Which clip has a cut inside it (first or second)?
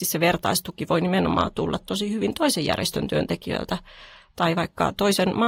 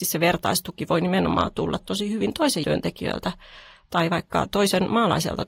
second